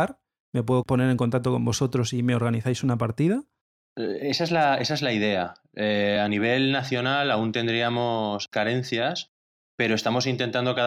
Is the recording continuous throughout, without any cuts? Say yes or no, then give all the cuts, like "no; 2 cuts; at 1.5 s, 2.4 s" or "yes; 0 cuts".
yes; 0 cuts